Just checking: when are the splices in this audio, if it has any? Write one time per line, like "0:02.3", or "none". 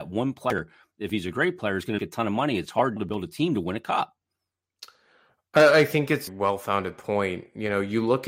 0:02.0
0:03.0
0:06.3